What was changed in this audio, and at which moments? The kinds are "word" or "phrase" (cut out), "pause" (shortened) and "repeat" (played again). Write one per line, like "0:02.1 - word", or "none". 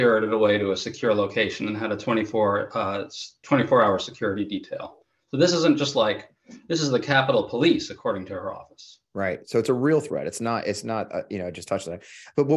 0:09.0 - pause